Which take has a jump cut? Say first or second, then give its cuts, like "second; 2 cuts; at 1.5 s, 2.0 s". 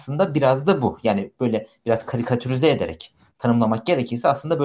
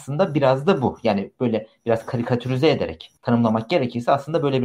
second; 1 cut; at 3.2 s